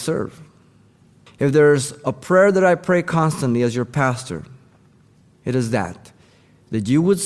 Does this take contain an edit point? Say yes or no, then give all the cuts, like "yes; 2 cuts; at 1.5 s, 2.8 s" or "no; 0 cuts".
no; 0 cuts